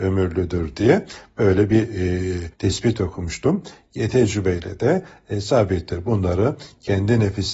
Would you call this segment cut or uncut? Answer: cut